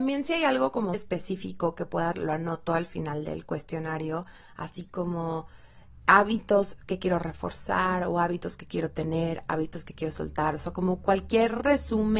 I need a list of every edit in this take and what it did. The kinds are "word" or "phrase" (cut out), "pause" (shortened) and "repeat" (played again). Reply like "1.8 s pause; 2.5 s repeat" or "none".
0.9 s word; 2.1 s word